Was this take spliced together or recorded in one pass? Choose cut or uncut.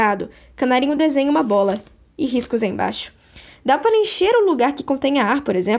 uncut